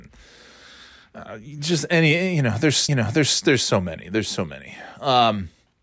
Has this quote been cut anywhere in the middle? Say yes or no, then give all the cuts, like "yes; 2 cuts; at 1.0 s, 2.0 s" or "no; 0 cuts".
yes; 1 cut; at 2.9 s